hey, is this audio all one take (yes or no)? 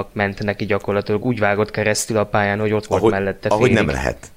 yes